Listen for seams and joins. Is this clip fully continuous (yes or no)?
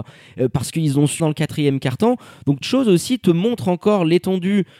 no